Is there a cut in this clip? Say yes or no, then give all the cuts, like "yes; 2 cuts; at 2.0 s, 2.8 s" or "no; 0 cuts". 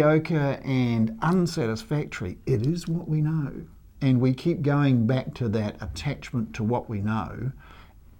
no; 0 cuts